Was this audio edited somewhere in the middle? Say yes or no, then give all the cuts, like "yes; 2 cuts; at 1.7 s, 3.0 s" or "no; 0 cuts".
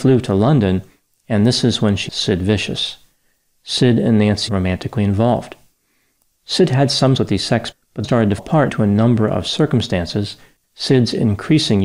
yes; 8 cuts; at 2.1 s, 4.5 s, 7.2 s, 7.7 s, 8.0 s, 8.4 s, 8.7 s, 10.6 s